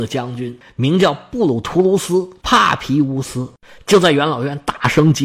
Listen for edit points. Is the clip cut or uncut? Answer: uncut